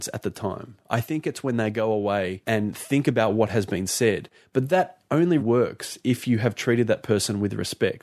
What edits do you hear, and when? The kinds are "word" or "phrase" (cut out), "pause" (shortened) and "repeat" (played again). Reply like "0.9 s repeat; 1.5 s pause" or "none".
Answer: 5.4 s word